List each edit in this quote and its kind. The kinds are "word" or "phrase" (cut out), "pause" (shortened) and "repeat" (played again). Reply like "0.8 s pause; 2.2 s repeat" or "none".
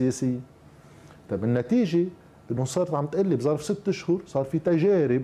none